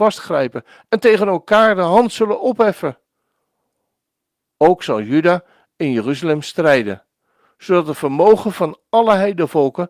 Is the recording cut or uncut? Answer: uncut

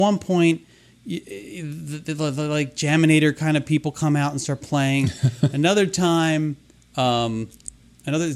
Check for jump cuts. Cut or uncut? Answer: uncut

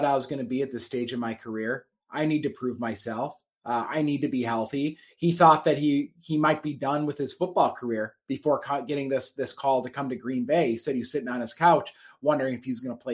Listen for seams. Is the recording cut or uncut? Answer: uncut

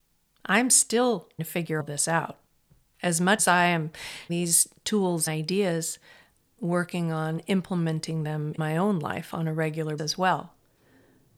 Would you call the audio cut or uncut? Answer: cut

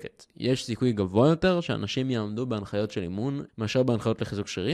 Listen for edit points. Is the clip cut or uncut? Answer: cut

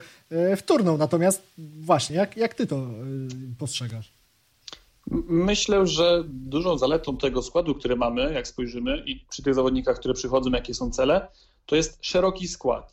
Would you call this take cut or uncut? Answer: uncut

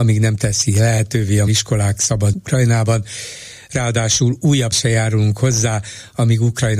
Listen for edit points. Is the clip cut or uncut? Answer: cut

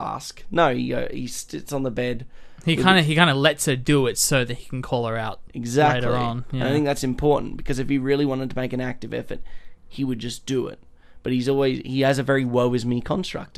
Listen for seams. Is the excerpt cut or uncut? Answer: uncut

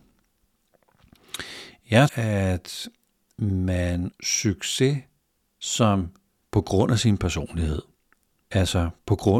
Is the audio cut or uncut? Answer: cut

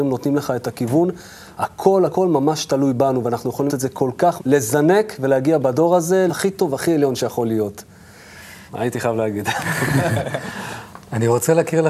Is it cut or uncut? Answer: cut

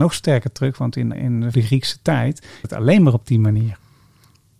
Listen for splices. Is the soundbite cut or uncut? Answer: cut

